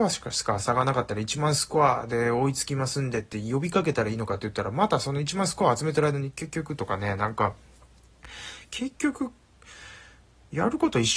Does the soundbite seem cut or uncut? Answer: uncut